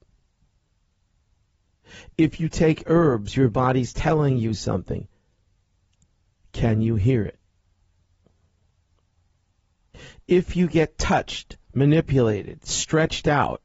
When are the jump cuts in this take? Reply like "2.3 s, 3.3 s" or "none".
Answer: none